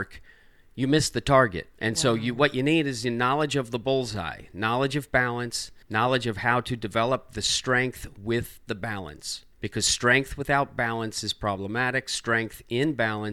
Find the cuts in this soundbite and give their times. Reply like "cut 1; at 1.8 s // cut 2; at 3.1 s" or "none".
cut 1; at 1.8 s // cut 2; at 5.8 s // cut 3; at 9.5 s